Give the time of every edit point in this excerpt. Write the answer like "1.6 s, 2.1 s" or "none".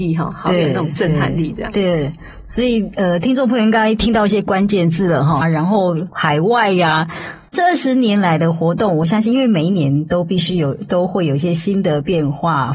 2.5 s, 5.4 s